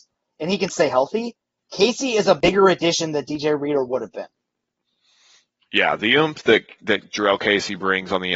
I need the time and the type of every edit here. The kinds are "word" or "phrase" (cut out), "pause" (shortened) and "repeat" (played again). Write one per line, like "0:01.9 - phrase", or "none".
none